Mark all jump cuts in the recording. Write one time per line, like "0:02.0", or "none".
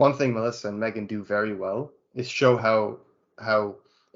none